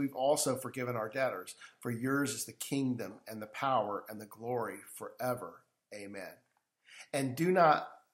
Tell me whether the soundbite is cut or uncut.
uncut